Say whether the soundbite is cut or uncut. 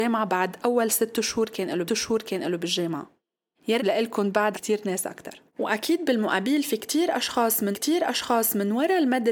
cut